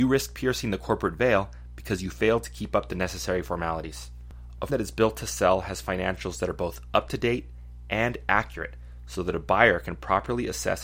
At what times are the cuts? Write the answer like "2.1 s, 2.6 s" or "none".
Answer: 4.7 s

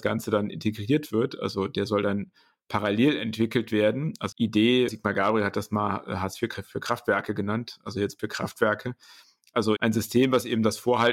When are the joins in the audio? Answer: 4.3 s, 4.9 s, 8.2 s, 9.8 s

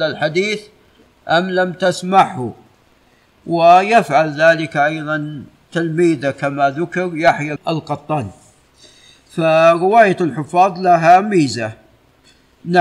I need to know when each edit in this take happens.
7.6 s

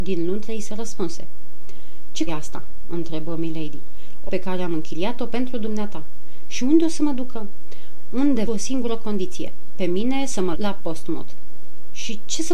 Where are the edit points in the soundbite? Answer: 2.3 s, 4.3 s, 8.5 s, 10.5 s

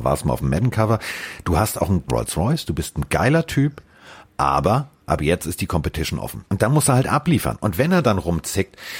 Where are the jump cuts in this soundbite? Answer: 2.1 s, 5.0 s, 6.5 s

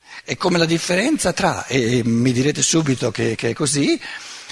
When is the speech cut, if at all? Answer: none

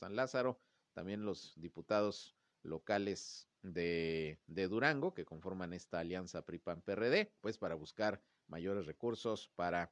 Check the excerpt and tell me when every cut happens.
3.6 s, 7.4 s

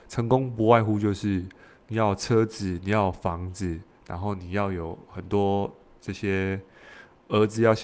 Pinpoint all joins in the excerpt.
none

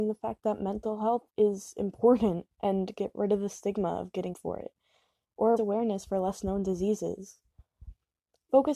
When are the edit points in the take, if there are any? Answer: 1.3 s, 4.3 s, 5.6 s

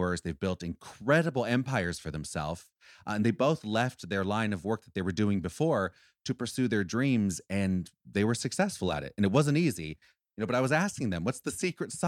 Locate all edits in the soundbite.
none

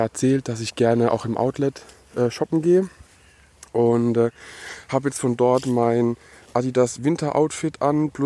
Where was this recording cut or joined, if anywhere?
none

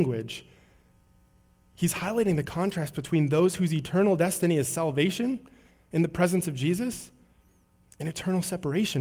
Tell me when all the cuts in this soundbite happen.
none

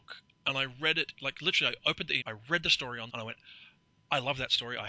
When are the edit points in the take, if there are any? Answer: 1.2 s, 2.2 s, 3.1 s

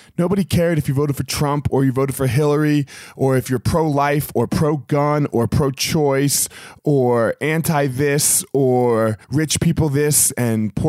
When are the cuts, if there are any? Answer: 9.2 s

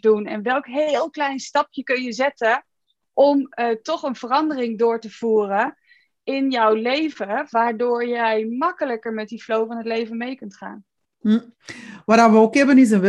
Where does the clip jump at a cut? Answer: none

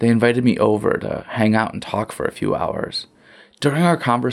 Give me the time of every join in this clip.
none

